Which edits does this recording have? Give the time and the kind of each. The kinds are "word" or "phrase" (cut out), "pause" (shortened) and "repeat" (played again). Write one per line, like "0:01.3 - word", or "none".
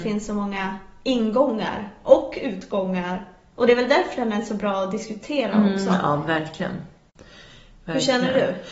none